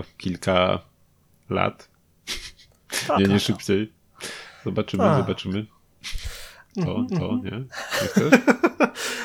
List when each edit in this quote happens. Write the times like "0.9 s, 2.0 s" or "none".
3.2 s, 7.1 s